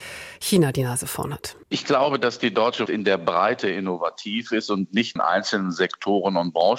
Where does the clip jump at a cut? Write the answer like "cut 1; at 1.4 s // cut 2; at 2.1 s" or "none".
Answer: cut 1; at 1.6 s // cut 2; at 2.9 s // cut 3; at 5.2 s